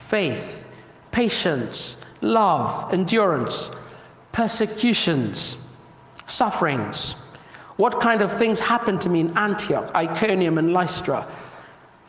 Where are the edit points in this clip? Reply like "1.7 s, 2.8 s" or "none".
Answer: none

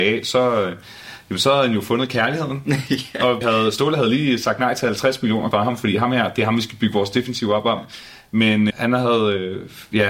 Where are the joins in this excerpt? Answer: 3.4 s, 5.5 s, 8.7 s

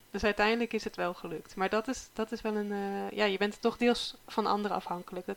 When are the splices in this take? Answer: none

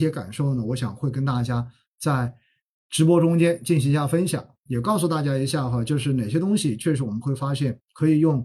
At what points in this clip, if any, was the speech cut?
none

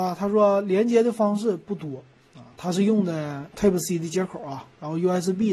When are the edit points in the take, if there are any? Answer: none

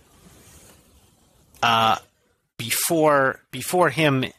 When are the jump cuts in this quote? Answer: none

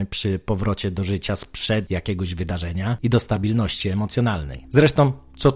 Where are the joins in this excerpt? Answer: none

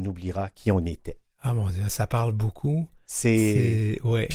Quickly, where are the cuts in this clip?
none

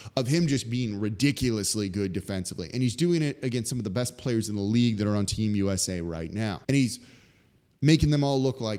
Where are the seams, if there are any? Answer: 6.6 s

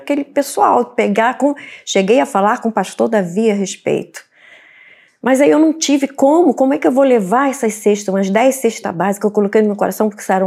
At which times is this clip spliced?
none

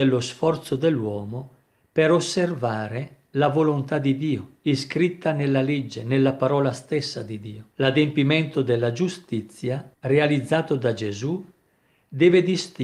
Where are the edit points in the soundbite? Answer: 7.7 s, 9.9 s

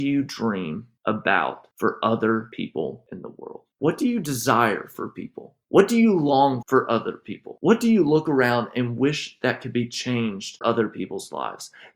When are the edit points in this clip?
3.7 s, 6.6 s, 10.6 s

